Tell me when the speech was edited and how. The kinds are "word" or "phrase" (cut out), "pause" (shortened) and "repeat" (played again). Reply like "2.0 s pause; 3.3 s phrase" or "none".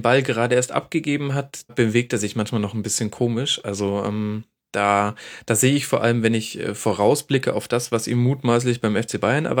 1.7 s word